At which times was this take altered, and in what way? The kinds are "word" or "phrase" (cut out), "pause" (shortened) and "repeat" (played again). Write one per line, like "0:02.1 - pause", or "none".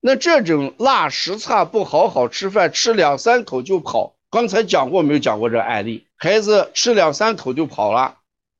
0:04.3 - pause
0:06.1 - pause